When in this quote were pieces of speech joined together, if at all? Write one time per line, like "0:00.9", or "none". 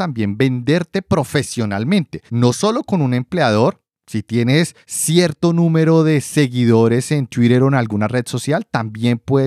0:02.3
0:04.8